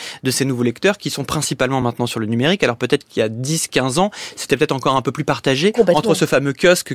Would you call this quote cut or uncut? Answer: uncut